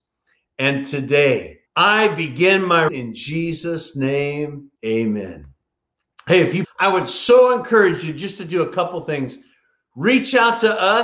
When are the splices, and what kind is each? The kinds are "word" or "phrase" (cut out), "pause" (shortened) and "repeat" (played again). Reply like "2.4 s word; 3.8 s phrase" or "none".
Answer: 1.7 s pause; 2.9 s phrase; 4.7 s pause; 6.6 s phrase